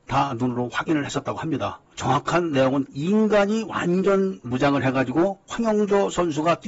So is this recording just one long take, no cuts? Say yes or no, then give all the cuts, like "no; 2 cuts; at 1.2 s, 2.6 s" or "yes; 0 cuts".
no; 1 cut; at 2.8 s